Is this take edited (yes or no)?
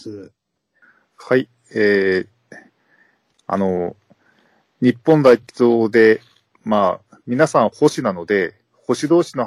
no